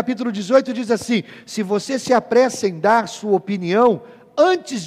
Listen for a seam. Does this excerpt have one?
no; 0 cuts

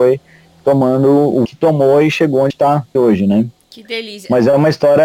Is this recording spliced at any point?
yes; 3 cuts; at 1.4 s, 2.5 s, 2.9 s

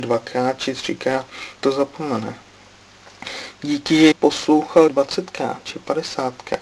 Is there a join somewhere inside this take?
yes; 3 cuts; at 1.6 s, 4.1 s, 4.9 s

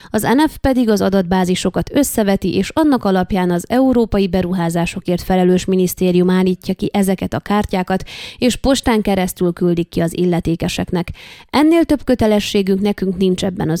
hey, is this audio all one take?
yes; 0 cuts

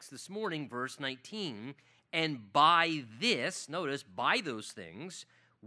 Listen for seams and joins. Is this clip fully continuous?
yes; 0 cuts

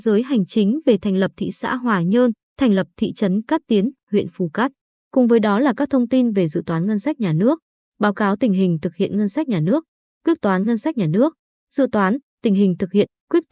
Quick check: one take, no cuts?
yes; 0 cuts

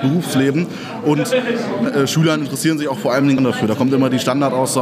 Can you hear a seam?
yes; 2 cuts; at 1.9 s, 3.4 s

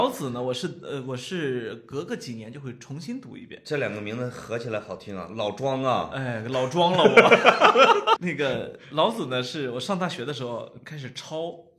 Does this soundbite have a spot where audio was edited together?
yes; 1 cut; at 8.2 s

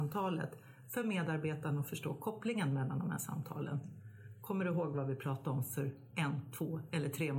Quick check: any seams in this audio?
no; 0 cuts

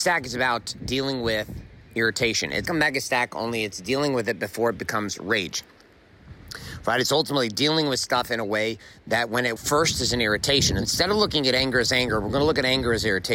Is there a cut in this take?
yes; 3 cuts; at 2.7 s, 9.6 s, 10.8 s

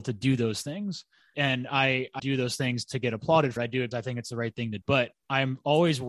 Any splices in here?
yes; 5 cuts; at 1.3 s, 2.2 s, 3.6 s, 3.9 s, 4.8 s

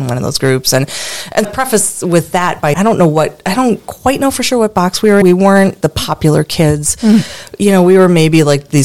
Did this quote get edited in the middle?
yes; 4 cuts; at 1.4 s, 2.7 s, 5.2 s, 5.8 s

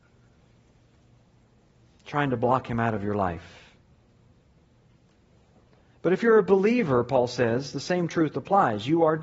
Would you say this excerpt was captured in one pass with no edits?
yes; 0 cuts

